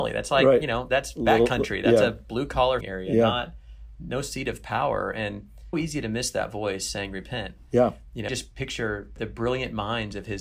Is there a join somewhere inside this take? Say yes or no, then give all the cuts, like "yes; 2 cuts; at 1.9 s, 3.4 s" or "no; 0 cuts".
yes; 4 cuts; at 2.8 s, 5.7 s, 8.3 s, 9.2 s